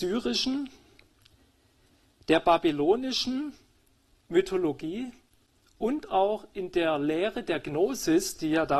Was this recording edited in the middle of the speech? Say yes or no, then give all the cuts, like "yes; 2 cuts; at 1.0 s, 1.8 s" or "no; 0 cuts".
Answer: no; 0 cuts